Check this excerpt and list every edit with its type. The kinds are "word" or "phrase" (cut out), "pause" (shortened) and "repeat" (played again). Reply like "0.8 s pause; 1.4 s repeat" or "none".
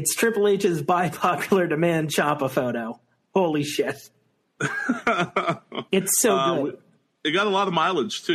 5.9 s pause

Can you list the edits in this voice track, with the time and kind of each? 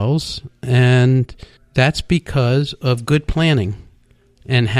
1.6 s pause

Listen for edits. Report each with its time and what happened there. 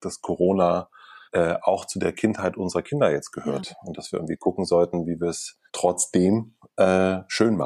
1.3 s pause; 5.7 s pause

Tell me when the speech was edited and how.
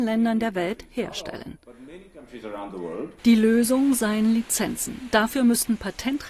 3.2 s pause

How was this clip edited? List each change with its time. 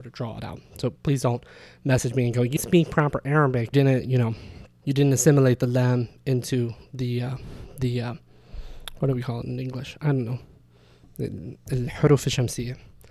1.0 s pause; 2.6 s word; 3.7 s phrase

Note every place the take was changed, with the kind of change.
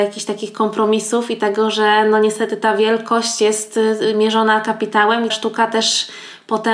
5.3 s word

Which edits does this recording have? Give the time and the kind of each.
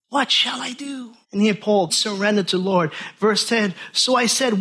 1.2 s pause; 1.9 s word

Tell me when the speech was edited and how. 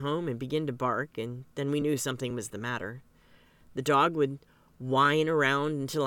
none

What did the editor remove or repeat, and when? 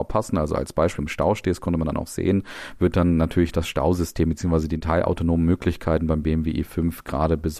1.0 s word

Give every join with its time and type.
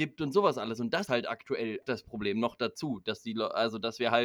1.1 s word; 1.8 s word

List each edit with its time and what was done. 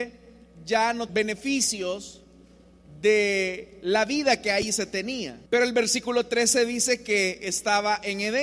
1.1 s phrase; 5.5 s pause

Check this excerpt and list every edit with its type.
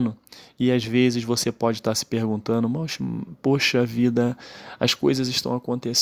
none

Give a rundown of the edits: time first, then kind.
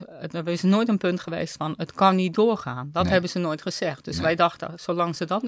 none

